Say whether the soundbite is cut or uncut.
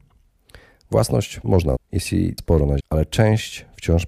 cut